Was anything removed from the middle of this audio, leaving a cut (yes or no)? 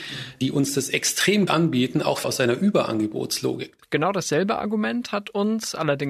yes